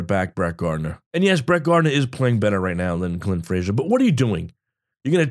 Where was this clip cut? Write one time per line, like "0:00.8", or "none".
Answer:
0:01.1

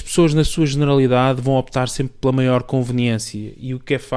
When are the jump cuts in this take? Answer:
none

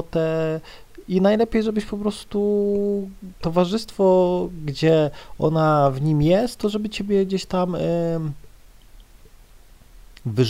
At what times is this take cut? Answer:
none

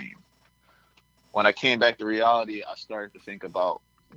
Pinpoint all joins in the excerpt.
none

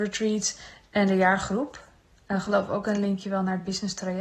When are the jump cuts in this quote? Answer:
none

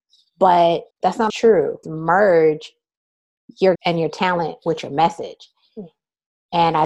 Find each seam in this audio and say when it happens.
0:00.9
0:01.3
0:01.8
0:03.8

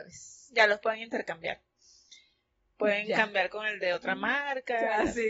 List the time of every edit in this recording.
none

